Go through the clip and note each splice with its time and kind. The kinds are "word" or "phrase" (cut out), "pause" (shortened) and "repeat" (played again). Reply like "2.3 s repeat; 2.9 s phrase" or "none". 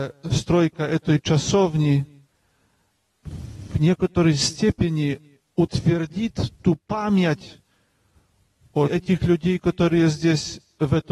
5.5 s pause; 8.8 s word